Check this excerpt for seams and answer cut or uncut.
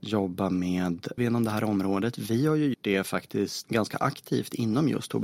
cut